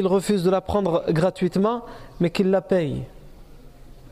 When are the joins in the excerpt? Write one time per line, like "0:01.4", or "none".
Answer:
none